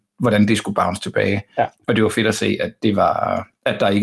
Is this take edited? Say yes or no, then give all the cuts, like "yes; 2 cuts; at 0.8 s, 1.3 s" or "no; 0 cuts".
no; 0 cuts